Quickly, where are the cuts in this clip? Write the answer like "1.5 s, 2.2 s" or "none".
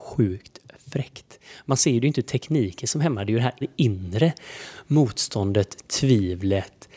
3.6 s